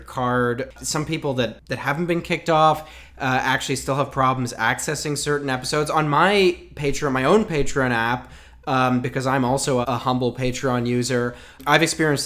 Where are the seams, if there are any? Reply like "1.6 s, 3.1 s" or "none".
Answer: 9.8 s